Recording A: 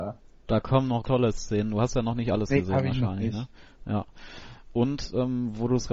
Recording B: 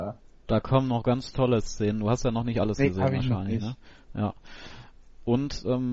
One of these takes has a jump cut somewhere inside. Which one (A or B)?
A